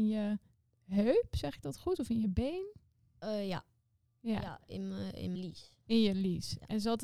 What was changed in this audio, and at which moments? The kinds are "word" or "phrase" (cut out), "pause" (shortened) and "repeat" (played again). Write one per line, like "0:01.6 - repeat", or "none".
0:05.3 - word